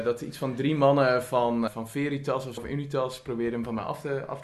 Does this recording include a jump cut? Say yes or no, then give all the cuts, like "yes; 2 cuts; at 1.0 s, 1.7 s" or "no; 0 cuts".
yes; 2 cuts; at 1.7 s, 2.6 s